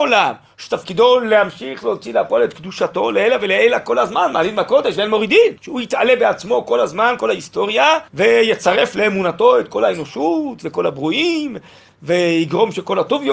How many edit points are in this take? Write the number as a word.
two